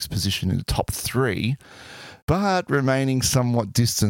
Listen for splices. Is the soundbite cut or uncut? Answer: cut